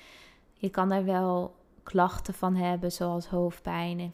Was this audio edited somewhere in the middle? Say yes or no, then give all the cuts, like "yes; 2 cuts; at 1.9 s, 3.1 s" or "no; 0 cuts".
no; 0 cuts